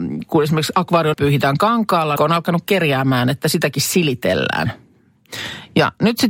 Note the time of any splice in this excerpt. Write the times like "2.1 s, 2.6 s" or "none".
1.1 s, 2.2 s